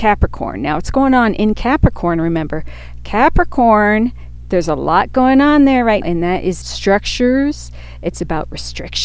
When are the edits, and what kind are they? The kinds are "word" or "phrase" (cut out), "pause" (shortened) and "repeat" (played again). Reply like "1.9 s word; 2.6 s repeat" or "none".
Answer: 6.0 s word; 6.6 s word